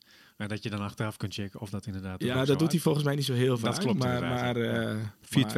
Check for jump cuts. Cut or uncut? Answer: cut